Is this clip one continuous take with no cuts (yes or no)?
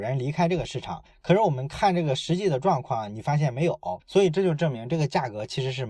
no